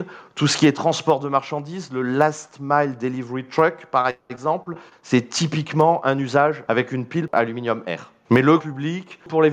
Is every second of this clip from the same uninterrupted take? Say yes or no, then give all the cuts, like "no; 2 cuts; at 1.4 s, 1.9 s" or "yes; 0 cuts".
no; 1 cut; at 8.6 s